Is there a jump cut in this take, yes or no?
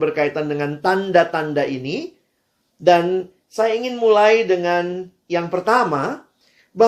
no